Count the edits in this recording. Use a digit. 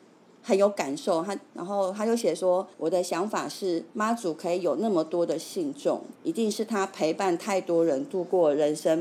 4